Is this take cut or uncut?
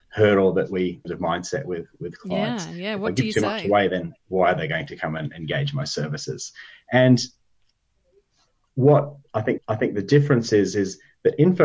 cut